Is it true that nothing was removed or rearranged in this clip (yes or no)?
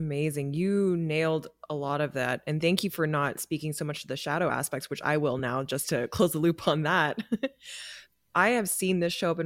yes